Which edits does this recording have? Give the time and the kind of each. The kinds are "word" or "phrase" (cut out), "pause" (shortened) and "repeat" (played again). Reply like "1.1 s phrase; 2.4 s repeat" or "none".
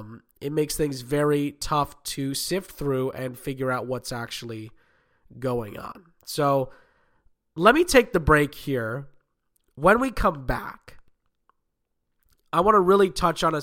none

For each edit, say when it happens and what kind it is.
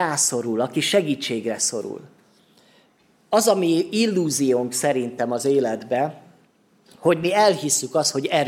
none

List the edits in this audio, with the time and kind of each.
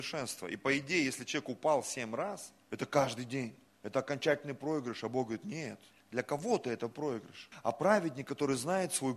2.6 s pause; 3.7 s pause; 5.9 s pause; 7.5 s pause

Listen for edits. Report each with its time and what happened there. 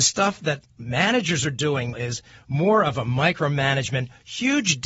1.9 s word

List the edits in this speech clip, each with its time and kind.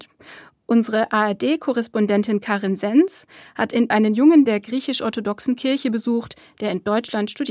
3.9 s word; 4.5 s word

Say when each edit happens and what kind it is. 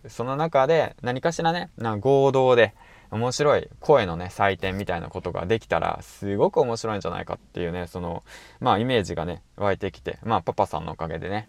none

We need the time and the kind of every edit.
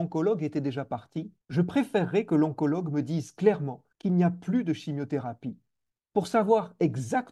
1.4 s pause; 3.9 s pause

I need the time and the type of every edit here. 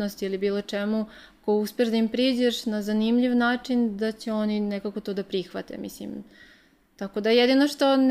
none

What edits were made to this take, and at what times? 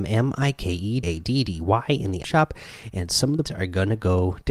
1.0 s word; 2.2 s word; 3.4 s word

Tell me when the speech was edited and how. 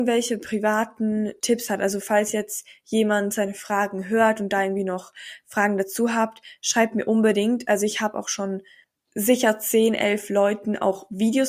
8.8 s pause

